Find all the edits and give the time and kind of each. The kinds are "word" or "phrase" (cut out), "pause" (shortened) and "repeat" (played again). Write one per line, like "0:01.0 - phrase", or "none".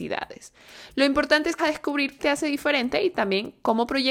0:01.6 - word
0:02.2 - phrase